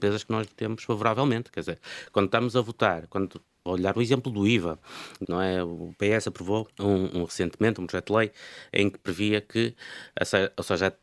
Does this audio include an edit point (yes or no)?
yes